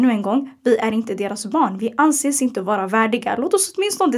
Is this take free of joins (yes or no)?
yes